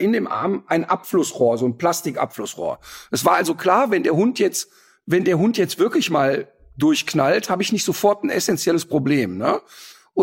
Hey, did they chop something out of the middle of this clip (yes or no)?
no